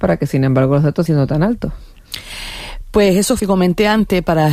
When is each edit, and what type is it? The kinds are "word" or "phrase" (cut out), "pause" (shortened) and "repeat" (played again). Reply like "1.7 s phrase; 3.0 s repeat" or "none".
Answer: 1.1 s word; 3.4 s word